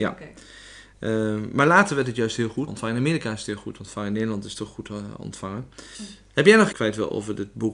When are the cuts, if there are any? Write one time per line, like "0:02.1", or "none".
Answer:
0:02.7
0:06.7

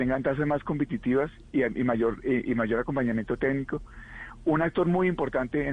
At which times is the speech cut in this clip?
none

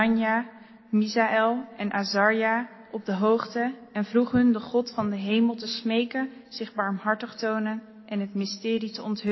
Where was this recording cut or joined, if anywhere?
0:07.3

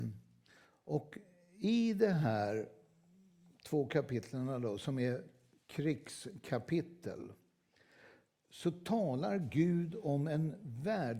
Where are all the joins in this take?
none

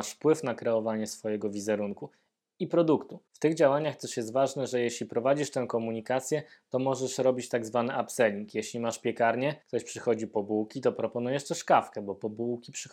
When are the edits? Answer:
0:09.6

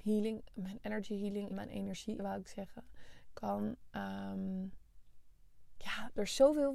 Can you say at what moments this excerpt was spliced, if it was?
0:01.5
0:02.2

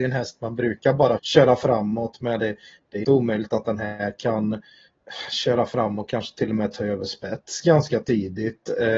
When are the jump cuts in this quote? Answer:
0:01.2
0:03.0

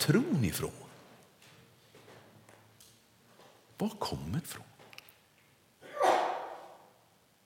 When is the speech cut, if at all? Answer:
0:04.4

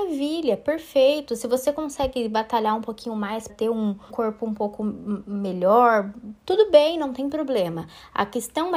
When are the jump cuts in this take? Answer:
0:03.5
0:04.1

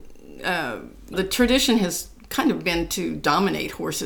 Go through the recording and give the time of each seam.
0:01.1

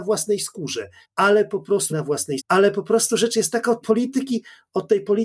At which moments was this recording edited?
0:01.0
0:01.9
0:02.4
0:03.8

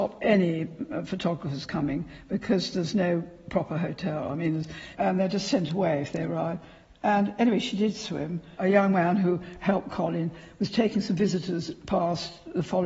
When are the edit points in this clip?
none

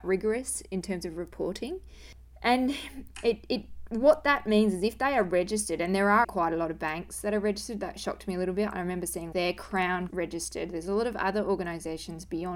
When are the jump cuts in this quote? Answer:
0:06.2
0:09.3
0:10.1

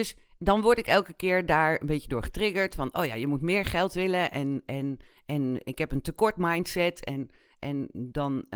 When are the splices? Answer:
none

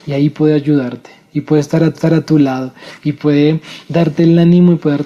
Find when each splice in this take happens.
0:01.9

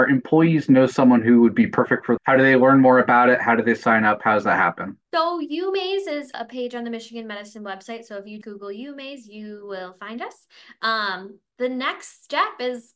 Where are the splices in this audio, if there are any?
0:02.2
0:05.0
0:06.3
0:08.4

